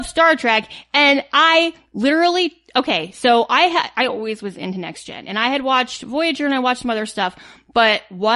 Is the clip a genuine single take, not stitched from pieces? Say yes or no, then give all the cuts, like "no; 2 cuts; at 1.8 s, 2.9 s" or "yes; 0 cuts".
yes; 0 cuts